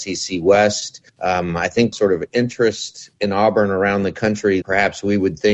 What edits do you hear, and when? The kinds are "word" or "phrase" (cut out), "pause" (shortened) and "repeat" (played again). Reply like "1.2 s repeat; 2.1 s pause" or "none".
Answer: 1.1 s pause; 1.9 s phrase; 3.1 s pause; 4.6 s word